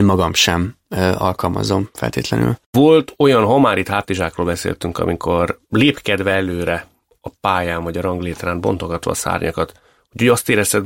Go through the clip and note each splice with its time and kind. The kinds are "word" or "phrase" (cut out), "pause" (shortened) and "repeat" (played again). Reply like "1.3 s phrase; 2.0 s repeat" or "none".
5.6 s pause